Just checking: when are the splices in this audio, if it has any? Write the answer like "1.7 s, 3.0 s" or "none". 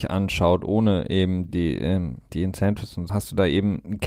1.5 s, 2.3 s, 3.1 s